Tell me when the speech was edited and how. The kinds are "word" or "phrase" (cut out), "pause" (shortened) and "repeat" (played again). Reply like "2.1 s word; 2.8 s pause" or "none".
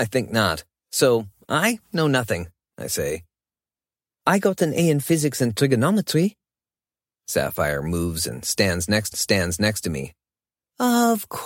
9.1 s repeat